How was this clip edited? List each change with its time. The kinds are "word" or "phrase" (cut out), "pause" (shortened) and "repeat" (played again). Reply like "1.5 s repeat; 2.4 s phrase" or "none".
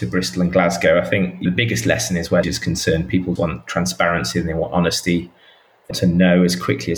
1.5 s word; 2.4 s word; 3.4 s word; 5.9 s word